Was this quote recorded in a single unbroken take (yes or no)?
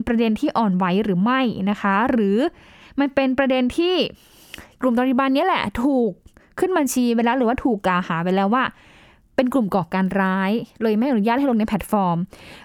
yes